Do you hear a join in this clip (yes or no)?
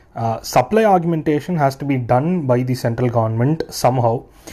no